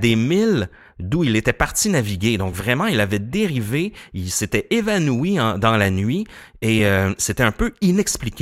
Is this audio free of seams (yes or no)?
yes